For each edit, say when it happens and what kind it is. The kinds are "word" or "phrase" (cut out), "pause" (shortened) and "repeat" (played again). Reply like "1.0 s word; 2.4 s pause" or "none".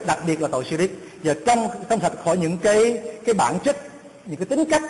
none